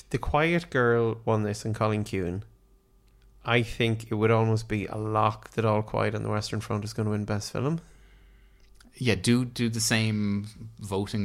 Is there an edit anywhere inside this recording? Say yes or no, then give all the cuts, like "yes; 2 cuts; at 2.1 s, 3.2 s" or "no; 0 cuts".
no; 0 cuts